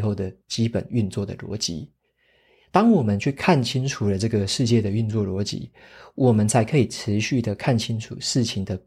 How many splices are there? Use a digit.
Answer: 0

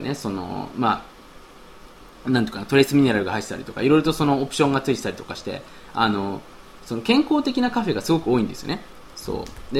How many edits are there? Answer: 0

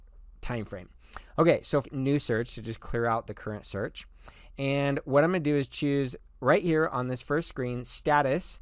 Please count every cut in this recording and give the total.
1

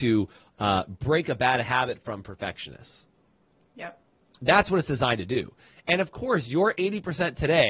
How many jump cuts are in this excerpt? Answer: 0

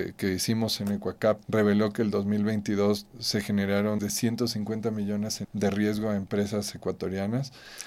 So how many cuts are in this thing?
4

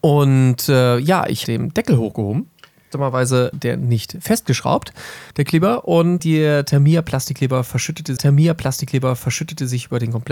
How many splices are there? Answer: 5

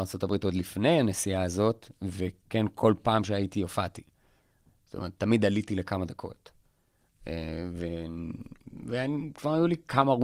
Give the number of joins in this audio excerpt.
0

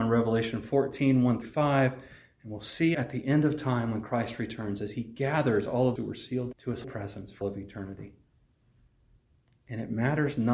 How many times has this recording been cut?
6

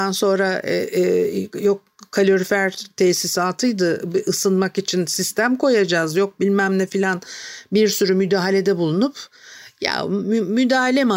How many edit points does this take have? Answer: 0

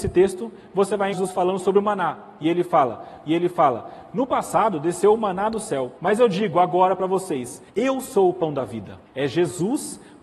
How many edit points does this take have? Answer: 5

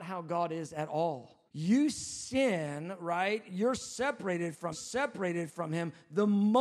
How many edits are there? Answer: 2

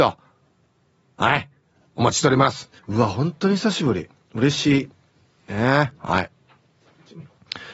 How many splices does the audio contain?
2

